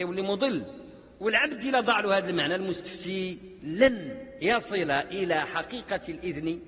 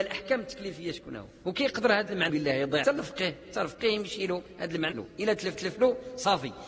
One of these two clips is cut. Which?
second; 4 cuts; at 2.3 s, 2.8 s, 4.9 s, 5.5 s

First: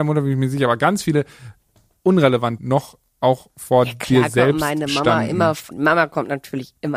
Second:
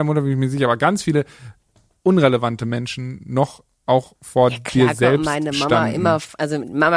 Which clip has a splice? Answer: first; 2 cuts; at 2.6 s, 5.7 s

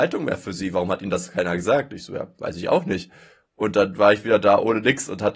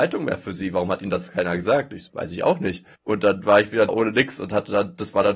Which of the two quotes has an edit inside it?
second; 3 cuts; at 2.1 s, 2.9 s, 3.9 s

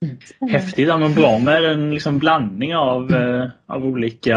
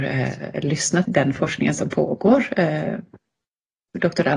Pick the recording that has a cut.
second; 1 cut; at 1.1 s

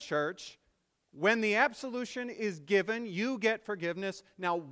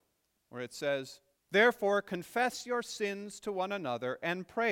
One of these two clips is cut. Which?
second; 1 cut; at 1.4 s

